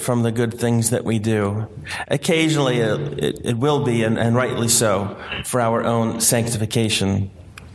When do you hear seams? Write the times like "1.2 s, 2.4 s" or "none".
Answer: none

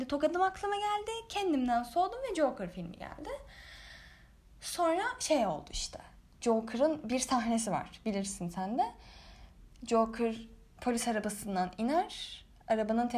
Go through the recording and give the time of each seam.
none

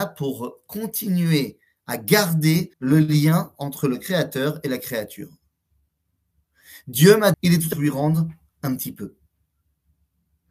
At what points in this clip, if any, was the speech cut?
2.7 s, 7.3 s, 7.7 s

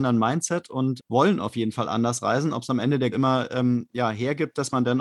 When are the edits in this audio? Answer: 1.0 s, 3.1 s

